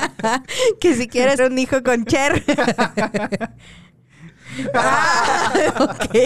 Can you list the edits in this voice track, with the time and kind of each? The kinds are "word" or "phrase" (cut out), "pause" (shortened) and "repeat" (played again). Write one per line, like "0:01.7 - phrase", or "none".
0:01.4 - word